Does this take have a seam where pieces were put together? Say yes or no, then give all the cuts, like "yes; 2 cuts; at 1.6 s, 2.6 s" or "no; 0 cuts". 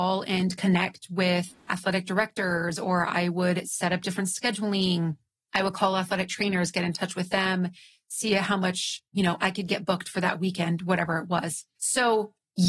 no; 0 cuts